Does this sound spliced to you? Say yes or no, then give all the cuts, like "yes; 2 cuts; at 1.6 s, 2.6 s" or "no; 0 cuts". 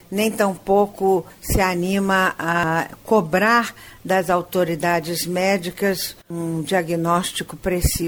no; 0 cuts